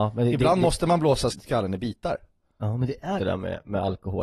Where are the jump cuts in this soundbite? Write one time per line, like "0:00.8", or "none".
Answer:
0:01.3
0:03.2